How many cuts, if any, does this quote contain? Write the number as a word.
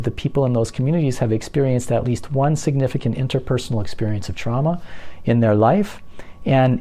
zero